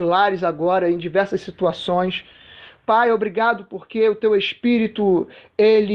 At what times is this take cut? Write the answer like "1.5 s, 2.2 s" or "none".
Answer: none